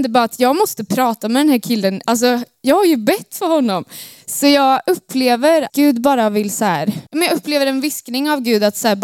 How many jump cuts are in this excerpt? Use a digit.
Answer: 2